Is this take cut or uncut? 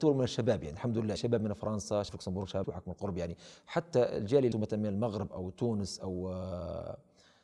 cut